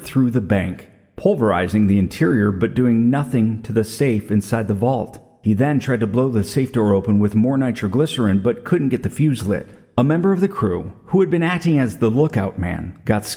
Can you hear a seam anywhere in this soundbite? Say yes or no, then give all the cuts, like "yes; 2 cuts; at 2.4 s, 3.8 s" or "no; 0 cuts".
no; 0 cuts